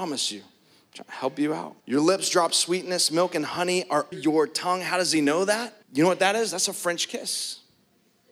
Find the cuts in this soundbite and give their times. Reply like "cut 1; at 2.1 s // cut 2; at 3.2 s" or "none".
cut 1; at 1.8 s // cut 2; at 4.1 s // cut 3; at 5.8 s